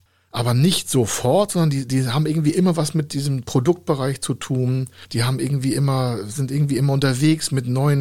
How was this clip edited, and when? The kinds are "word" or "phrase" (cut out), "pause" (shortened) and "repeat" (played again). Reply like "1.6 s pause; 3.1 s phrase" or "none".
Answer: none